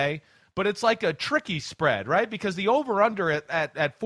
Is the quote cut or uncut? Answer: uncut